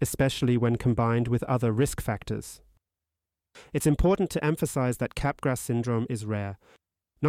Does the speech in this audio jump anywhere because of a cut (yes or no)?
no